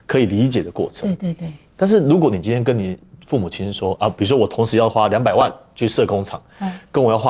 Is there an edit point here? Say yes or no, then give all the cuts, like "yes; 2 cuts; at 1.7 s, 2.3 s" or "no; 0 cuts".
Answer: no; 0 cuts